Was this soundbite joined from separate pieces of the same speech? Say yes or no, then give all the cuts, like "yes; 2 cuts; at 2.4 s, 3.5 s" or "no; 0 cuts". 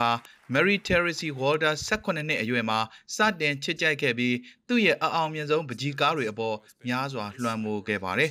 no; 0 cuts